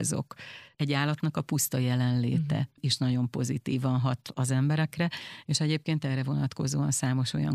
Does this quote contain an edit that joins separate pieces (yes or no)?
no